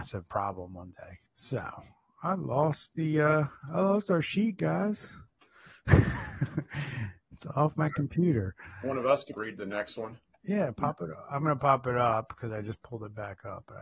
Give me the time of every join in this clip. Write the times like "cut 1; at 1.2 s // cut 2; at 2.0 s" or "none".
cut 1; at 1.3 s // cut 2; at 9.4 s